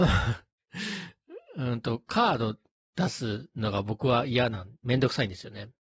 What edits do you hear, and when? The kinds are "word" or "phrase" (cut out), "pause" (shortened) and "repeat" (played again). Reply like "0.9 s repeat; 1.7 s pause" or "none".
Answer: none